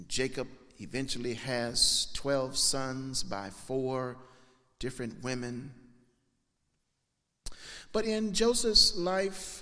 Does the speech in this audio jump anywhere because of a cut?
no; 0 cuts

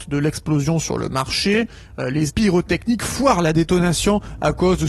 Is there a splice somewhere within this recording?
yes; 1 cut; at 2.3 s

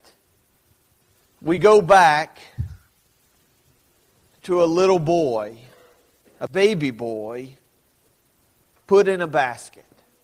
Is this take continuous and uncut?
yes; 0 cuts

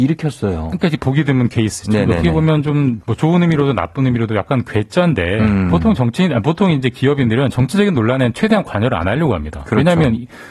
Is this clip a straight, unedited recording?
yes; 0 cuts

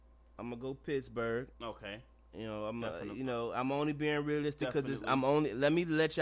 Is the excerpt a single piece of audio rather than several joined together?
no; 1 cut; at 1.5 s

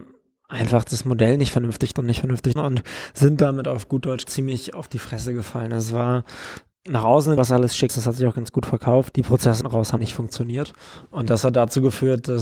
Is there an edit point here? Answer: yes; 9 cuts; at 1.9 s, 2.6 s, 4.2 s, 6.7 s, 7.4 s, 7.9 s, 9.1 s, 9.6 s, 10.0 s

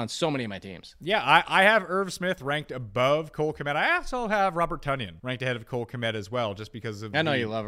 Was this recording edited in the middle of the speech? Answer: yes; 1 cut; at 5.2 s

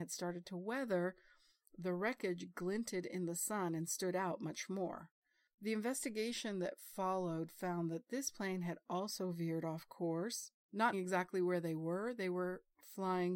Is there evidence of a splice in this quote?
yes; 1 cut; at 10.9 s

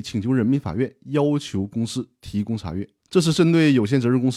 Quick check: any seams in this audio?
yes; 1 cut; at 3.0 s

